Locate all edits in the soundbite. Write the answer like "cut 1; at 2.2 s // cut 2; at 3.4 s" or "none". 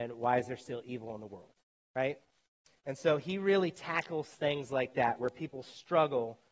none